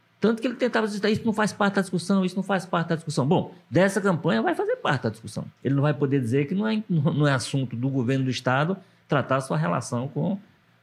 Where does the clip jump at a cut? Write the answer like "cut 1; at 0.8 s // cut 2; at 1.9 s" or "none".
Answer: cut 1; at 5.6 s